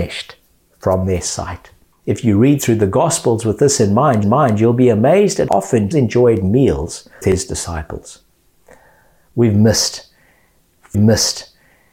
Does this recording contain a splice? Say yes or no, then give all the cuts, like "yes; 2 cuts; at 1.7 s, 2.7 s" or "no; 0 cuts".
yes; 6 cuts; at 1.9 s, 4.2 s, 5.5 s, 5.9 s, 7.2 s, 10.9 s